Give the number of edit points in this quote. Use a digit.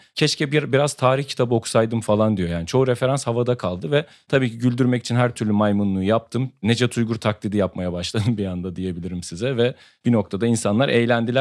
0